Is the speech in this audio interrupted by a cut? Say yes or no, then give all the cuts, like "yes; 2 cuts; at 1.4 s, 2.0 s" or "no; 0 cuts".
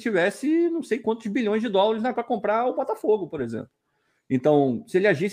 yes; 1 cut; at 2.1 s